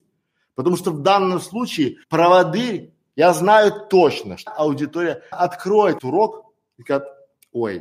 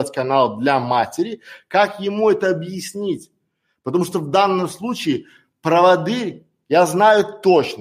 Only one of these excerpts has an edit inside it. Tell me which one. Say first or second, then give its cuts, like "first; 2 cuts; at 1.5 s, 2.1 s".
first; 4 cuts; at 2.0 s, 4.5 s, 5.3 s, 6.0 s